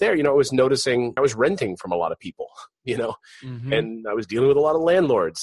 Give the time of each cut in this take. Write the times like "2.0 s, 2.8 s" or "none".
none